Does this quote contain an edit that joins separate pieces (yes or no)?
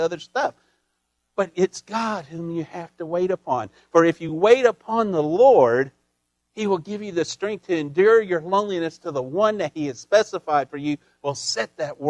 no